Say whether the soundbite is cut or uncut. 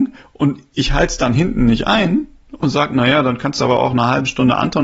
uncut